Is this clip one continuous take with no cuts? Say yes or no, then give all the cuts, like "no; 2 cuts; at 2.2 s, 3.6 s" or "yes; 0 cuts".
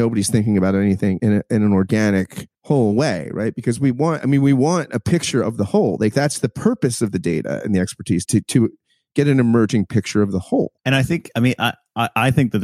no; 3 cuts; at 1.2 s, 8.2 s, 10.8 s